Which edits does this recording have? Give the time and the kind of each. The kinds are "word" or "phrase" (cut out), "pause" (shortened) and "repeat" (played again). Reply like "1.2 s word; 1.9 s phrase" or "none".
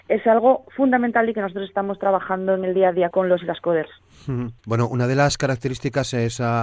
3.1 s word; 4.6 s pause